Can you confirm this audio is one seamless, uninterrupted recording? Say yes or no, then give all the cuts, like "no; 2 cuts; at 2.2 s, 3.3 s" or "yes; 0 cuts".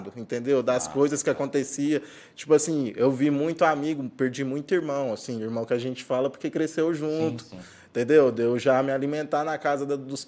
yes; 0 cuts